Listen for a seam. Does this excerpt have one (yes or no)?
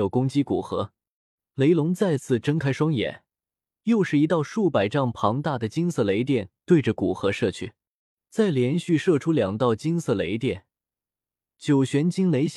no